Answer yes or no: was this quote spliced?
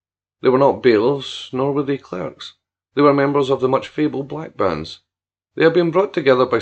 no